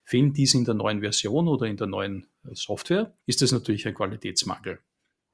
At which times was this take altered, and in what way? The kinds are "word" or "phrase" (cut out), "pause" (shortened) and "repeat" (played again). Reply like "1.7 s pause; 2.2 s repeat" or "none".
3.2 s pause